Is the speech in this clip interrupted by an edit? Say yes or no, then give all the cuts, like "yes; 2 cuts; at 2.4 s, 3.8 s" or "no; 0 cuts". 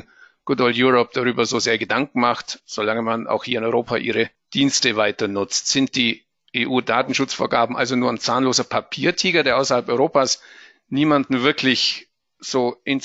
no; 0 cuts